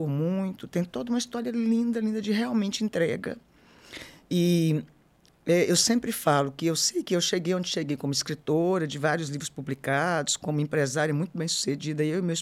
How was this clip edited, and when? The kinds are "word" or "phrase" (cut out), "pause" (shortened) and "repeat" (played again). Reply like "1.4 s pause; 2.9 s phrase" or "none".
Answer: none